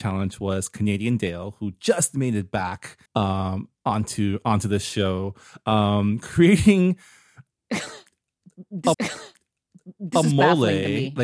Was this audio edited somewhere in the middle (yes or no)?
yes